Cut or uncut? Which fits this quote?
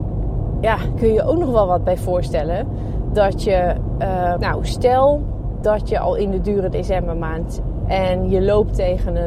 cut